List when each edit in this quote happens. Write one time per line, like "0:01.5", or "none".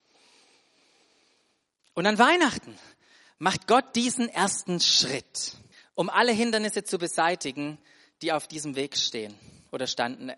0:05.7